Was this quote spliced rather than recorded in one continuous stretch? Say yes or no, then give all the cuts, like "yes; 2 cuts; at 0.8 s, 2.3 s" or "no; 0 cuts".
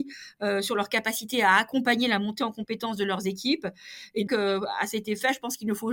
yes; 1 cut; at 4.3 s